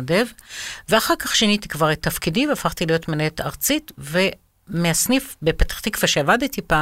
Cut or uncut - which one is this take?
uncut